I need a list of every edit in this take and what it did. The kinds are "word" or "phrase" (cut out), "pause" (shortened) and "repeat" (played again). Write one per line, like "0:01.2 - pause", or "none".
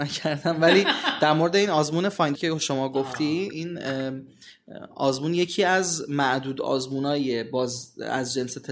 0:02.4 - word